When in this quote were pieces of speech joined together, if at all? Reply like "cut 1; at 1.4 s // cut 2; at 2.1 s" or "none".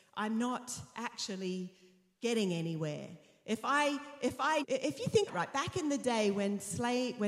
cut 1; at 4.6 s // cut 2; at 5.3 s